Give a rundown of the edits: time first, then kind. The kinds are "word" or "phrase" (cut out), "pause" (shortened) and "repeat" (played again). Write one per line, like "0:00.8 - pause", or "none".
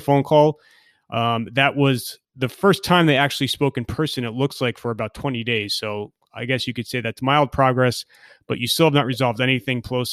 0:02.2 - pause